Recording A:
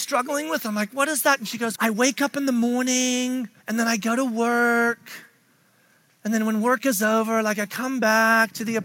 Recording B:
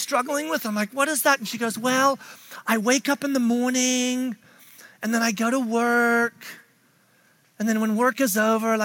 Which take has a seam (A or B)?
A